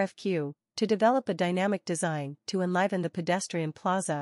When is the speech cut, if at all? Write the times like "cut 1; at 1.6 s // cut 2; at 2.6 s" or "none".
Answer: none